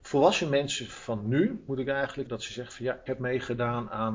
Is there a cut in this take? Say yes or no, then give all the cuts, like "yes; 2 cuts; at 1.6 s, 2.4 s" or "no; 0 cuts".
yes; 3 cuts; at 1.7 s, 2.3 s, 3.1 s